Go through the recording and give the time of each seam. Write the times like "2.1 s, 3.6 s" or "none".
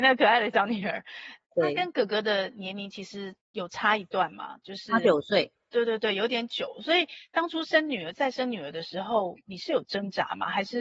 3.4 s